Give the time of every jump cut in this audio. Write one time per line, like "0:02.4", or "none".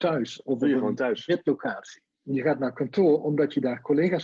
0:02.1